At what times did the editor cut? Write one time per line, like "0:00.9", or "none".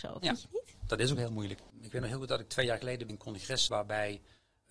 0:03.1
0:03.7